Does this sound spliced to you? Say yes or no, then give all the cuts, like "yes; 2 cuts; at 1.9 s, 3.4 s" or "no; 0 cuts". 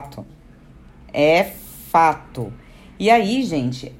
no; 0 cuts